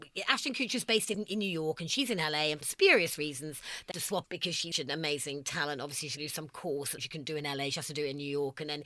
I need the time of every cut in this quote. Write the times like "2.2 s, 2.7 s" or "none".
1.1 s, 2.6 s, 3.9 s, 4.2 s, 4.7 s, 6.2 s, 7.0 s